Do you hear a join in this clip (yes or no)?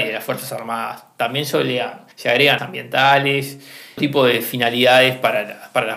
yes